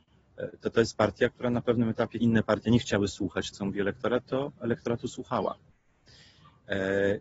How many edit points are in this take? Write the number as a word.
two